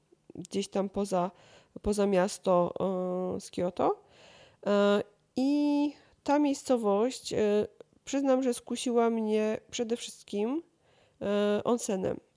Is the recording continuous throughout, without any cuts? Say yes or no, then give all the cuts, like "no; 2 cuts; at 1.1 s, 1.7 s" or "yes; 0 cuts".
yes; 0 cuts